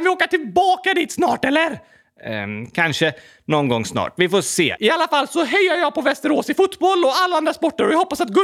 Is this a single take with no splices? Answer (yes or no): yes